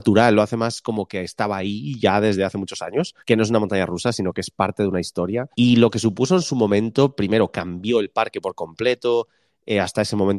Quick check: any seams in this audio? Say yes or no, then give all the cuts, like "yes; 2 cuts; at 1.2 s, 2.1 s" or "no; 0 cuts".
yes; 2 cuts; at 3.2 s, 5.5 s